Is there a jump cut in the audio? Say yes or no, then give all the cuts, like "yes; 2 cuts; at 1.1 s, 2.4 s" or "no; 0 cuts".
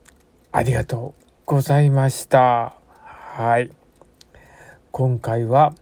yes; 1 cut; at 1.4 s